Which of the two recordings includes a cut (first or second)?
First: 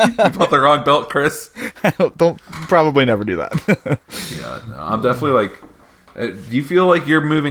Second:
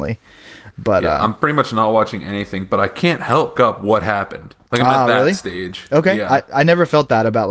second